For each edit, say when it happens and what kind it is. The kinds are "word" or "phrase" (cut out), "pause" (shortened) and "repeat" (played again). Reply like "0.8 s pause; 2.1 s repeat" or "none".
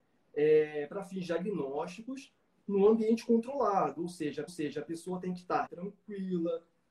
4.5 s repeat; 5.7 s word